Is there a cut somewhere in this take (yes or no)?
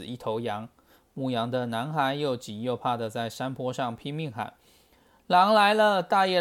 no